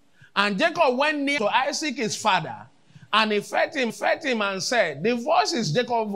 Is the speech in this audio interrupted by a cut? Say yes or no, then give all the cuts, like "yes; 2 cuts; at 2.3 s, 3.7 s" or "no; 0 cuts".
yes; 2 cuts; at 1.4 s, 3.9 s